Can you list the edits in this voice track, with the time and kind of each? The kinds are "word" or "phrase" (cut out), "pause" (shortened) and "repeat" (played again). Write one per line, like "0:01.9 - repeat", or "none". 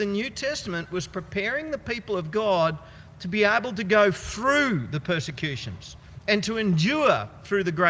none